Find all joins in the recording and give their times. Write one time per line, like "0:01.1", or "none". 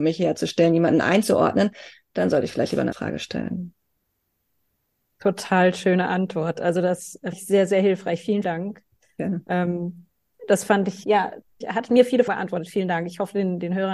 0:02.9
0:07.3
0:08.4
0:11.0
0:11.6
0:12.3